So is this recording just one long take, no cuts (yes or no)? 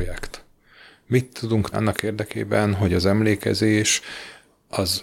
no